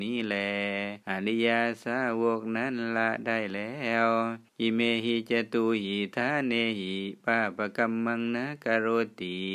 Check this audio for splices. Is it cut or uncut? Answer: cut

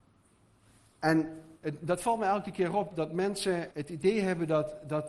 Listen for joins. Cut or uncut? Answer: cut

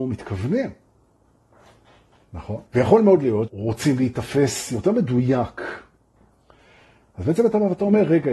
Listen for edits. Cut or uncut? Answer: cut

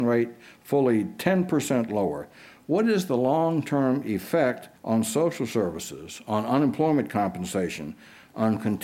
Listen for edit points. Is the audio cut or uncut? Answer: cut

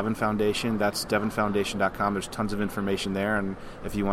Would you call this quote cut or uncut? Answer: uncut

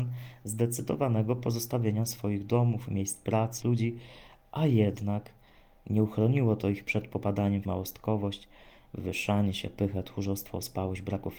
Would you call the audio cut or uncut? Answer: cut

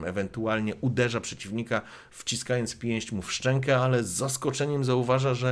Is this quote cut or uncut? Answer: uncut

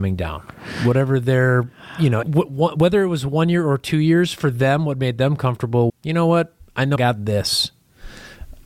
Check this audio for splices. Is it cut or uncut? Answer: cut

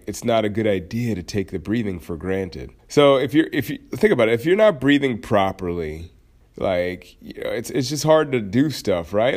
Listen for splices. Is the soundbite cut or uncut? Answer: cut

